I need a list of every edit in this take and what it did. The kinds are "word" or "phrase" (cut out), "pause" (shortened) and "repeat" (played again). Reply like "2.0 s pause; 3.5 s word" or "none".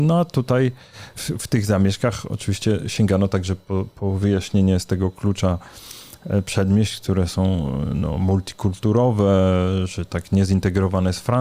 none